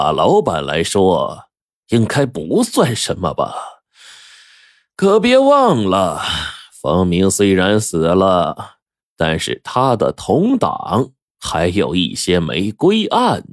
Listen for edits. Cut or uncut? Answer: uncut